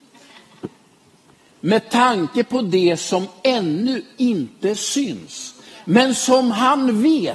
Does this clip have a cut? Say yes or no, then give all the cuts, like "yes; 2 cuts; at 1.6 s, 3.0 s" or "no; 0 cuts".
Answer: no; 0 cuts